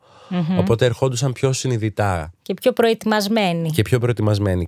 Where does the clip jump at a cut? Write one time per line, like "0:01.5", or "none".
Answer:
none